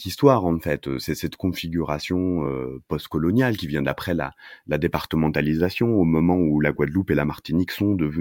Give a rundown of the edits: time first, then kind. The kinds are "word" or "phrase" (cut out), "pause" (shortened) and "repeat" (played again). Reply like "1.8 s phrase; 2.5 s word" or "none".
none